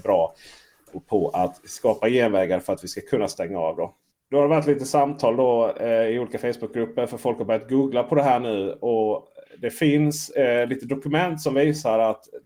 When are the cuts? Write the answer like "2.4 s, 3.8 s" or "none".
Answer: none